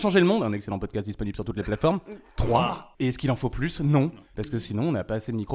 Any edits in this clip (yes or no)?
yes